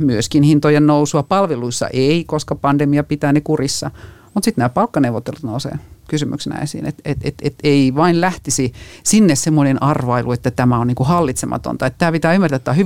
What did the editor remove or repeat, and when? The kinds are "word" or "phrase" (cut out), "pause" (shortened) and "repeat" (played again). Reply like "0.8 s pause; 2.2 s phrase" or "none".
none